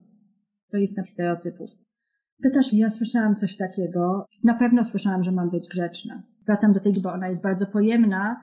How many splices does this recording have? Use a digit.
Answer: 3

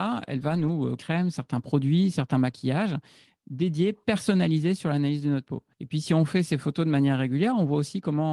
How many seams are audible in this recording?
2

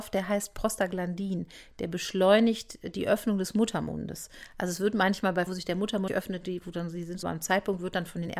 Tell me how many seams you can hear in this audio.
3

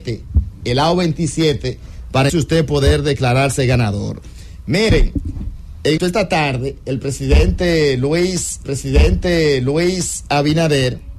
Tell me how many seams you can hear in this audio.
3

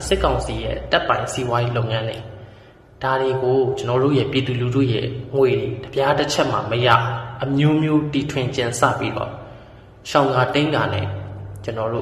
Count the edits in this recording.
0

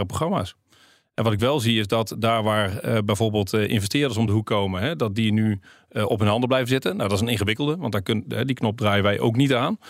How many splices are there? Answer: 0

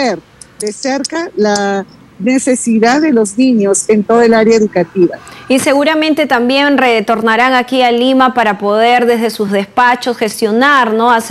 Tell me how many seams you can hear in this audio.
0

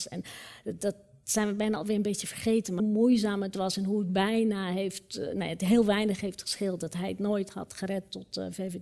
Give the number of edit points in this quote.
1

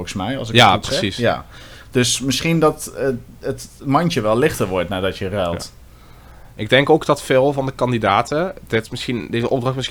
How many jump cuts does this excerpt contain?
0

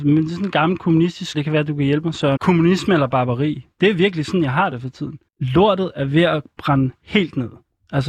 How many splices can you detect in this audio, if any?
3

